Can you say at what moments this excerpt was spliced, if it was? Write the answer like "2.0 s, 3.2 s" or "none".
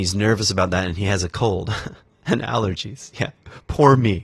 none